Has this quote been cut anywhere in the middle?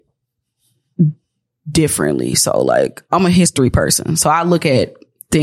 no; 0 cuts

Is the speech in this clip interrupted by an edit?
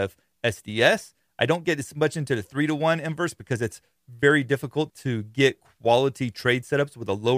yes; 1 cut; at 4.9 s

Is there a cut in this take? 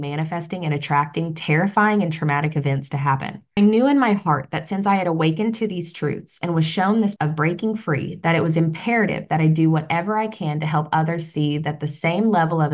yes; 1 cut; at 7.2 s

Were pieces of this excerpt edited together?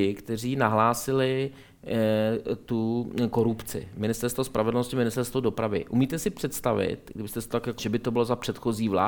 yes; 1 cut; at 7.8 s

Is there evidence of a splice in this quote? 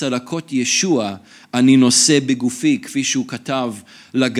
no; 0 cuts

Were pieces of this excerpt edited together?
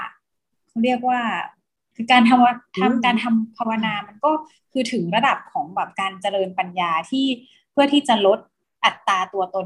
no; 0 cuts

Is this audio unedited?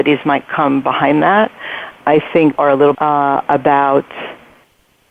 no; 3 cuts; at 2.0 s, 2.6 s, 2.9 s

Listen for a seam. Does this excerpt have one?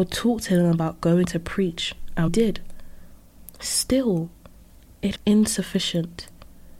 yes; 3 cuts; at 1.2 s, 2.3 s, 5.2 s

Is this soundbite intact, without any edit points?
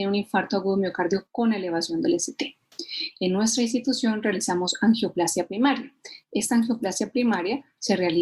yes; 0 cuts

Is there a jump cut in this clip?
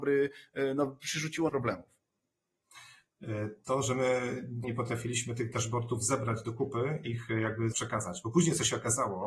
yes; 4 cuts; at 1.5 s, 4.6 s, 7.0 s, 7.7 s

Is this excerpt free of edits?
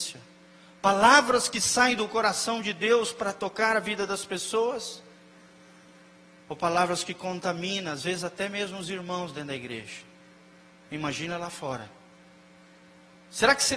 yes; 0 cuts

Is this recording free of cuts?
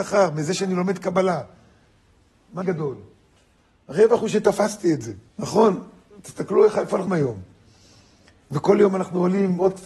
no; 3 cuts; at 2.6 s, 5.3 s, 7.1 s

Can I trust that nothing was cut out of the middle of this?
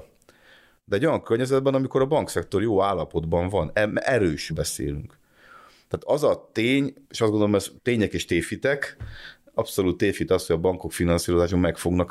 no; 3 cuts; at 4.5 s, 7.0 s, 7.8 s

